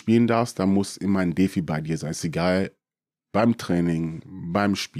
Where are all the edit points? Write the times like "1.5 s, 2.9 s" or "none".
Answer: none